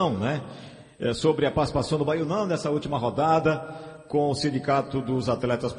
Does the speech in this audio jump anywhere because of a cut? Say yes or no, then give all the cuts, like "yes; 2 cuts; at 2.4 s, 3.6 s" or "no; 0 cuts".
no; 0 cuts